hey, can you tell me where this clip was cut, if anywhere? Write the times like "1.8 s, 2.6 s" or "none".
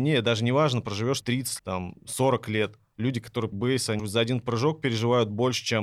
1.2 s, 1.6 s, 3.5 s, 4.0 s